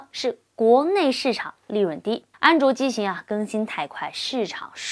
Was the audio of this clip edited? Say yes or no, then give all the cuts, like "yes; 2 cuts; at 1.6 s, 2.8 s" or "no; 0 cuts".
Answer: yes; 1 cut; at 2.3 s